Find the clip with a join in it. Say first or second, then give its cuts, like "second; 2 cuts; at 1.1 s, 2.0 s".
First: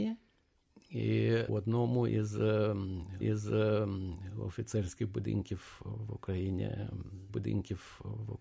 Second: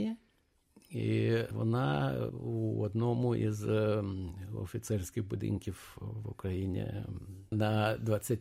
first; 3 cuts; at 1.5 s, 3.2 s, 7.3 s